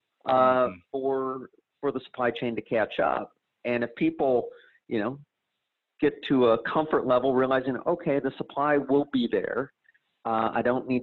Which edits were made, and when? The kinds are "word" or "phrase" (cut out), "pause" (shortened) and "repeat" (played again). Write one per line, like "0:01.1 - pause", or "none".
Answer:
none